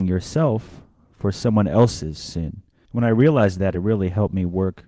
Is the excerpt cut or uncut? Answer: uncut